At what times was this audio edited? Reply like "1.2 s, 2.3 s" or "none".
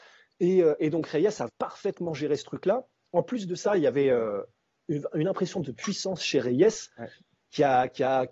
1.5 s